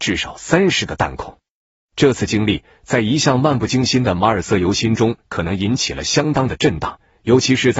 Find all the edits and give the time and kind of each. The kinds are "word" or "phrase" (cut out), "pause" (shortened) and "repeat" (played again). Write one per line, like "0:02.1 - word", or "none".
none